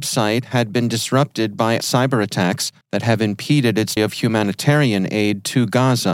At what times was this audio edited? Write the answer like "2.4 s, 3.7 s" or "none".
1.8 s, 2.8 s, 4.0 s